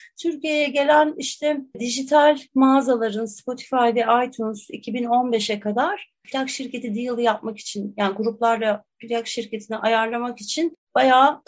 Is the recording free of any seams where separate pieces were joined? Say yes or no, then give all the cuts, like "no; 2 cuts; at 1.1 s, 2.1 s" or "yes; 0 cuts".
yes; 0 cuts